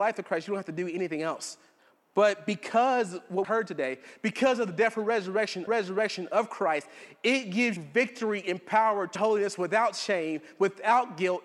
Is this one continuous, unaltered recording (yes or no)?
no